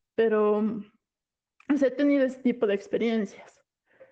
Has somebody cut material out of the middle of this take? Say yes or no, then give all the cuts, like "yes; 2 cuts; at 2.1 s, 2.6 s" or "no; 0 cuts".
no; 0 cuts